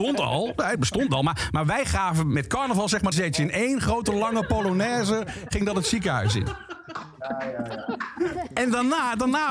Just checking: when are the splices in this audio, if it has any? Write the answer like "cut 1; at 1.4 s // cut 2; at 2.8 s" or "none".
cut 1; at 3.1 s